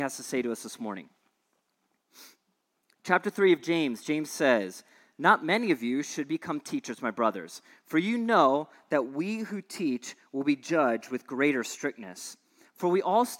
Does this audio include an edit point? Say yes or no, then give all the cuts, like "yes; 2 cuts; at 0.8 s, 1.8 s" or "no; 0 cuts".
no; 0 cuts